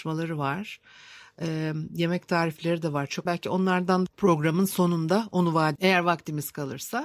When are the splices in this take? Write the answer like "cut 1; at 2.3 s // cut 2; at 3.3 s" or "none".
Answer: cut 1; at 3.3 s // cut 2; at 4.1 s // cut 3; at 5.8 s